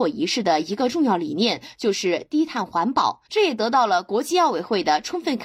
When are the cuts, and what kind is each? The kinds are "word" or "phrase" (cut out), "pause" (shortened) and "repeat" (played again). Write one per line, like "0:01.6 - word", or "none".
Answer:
0:03.3 - pause